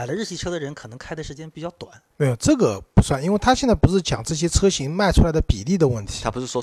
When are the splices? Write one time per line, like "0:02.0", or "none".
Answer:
0:02.1